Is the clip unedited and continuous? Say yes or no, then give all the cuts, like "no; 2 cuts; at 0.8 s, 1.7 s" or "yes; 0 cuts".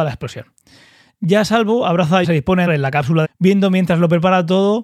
no; 3 cuts; at 2.2 s, 2.7 s, 3.2 s